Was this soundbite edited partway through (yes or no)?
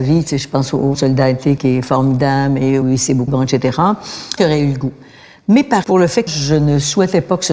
yes